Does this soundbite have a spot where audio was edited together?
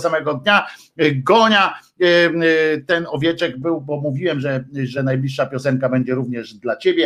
no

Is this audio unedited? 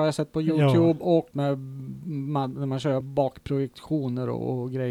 no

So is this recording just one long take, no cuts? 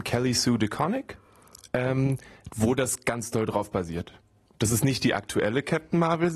yes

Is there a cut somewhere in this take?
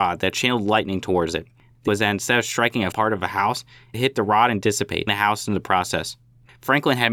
yes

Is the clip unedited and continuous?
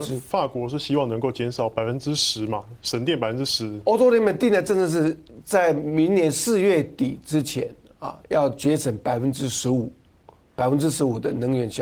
yes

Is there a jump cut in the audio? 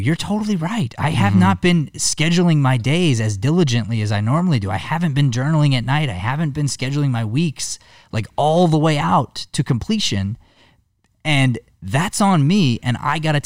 no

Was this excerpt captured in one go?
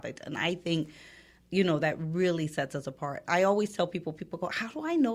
yes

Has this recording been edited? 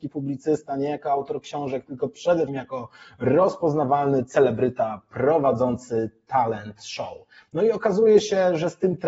yes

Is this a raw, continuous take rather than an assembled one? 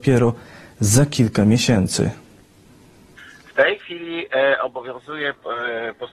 yes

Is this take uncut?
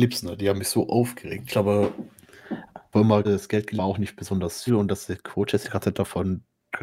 no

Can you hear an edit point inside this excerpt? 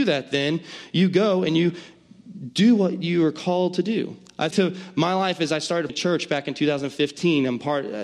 yes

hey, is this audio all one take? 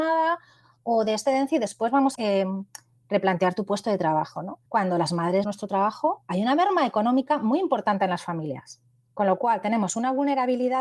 no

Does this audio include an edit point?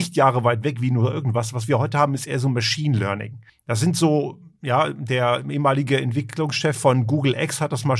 yes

